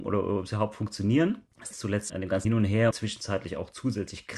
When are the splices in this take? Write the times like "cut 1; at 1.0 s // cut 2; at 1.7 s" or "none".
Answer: cut 1; at 1.7 s // cut 2; at 2.1 s // cut 3; at 2.4 s // cut 4; at 2.9 s